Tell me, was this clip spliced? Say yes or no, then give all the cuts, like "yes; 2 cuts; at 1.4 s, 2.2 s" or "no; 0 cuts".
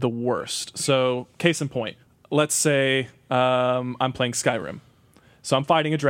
yes; 1 cut; at 2.0 s